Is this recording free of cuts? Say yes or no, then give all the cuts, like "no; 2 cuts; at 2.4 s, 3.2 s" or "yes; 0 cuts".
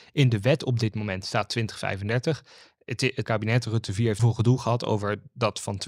no; 2 cuts; at 3.2 s, 4.2 s